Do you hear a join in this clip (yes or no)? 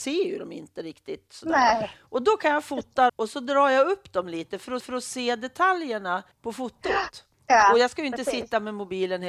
yes